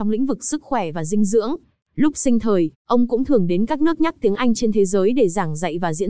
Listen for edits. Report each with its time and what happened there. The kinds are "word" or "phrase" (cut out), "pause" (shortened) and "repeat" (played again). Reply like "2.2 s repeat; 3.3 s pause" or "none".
none